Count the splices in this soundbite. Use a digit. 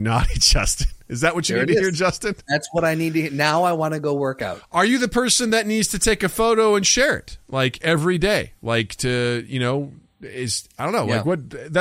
0